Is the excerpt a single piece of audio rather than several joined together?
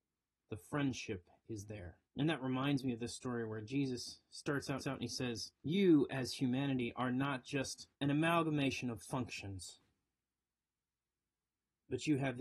no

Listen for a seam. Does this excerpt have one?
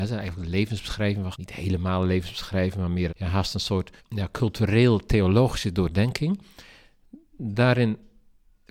yes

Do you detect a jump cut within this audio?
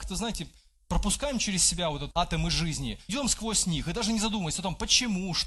yes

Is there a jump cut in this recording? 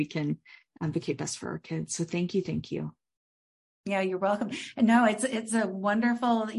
no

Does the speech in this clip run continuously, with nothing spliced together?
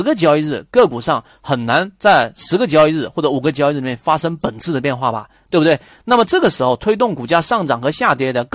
yes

